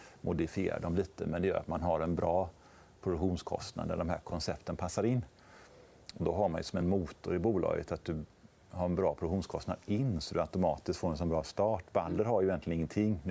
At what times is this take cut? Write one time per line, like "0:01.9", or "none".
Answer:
none